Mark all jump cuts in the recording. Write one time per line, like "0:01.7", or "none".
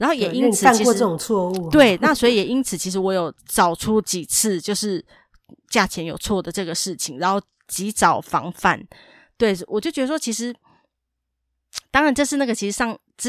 0:03.4